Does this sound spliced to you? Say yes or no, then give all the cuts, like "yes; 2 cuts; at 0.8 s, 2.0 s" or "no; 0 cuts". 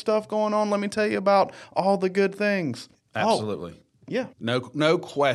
yes; 2 cuts; at 2.9 s, 4.3 s